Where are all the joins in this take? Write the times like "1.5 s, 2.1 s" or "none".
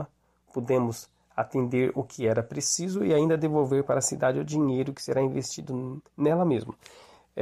6.1 s